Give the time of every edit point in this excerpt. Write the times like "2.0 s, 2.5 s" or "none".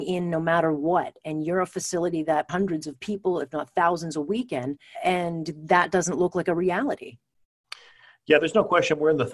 2.5 s, 4.9 s